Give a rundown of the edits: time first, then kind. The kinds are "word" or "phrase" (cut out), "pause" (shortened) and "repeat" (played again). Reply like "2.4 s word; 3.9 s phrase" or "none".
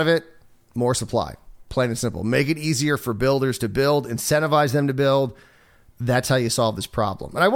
none